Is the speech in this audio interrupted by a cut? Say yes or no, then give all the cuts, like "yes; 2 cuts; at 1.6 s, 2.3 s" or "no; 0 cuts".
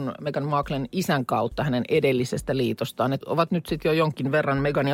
yes; 1 cut; at 3.2 s